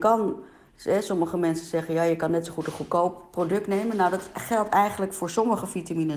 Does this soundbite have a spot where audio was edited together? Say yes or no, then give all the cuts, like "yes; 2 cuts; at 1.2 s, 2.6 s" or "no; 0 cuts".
no; 0 cuts